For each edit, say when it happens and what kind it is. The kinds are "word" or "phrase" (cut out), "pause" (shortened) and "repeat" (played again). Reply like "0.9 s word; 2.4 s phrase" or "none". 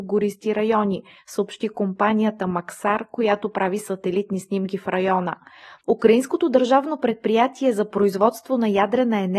none